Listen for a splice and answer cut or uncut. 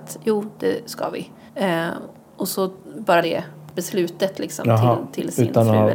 cut